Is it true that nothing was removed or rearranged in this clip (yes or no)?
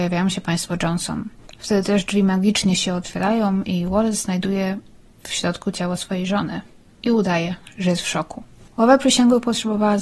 yes